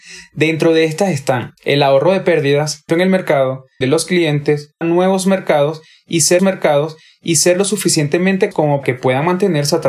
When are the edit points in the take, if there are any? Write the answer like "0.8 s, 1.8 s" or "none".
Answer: 1.6 s, 2.9 s, 3.8 s, 4.8 s, 6.4 s, 8.5 s, 8.8 s